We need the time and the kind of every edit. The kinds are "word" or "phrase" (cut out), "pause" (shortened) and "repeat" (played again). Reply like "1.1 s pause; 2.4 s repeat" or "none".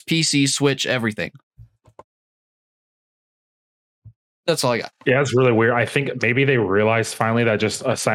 none